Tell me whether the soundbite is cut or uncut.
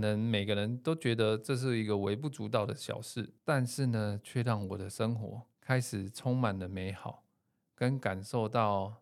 cut